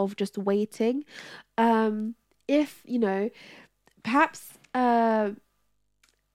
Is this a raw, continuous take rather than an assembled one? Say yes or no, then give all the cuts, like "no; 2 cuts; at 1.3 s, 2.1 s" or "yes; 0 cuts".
yes; 0 cuts